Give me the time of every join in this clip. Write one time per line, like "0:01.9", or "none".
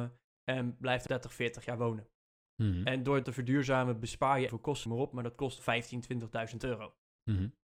0:01.1
0:03.2
0:04.5
0:04.9
0:05.6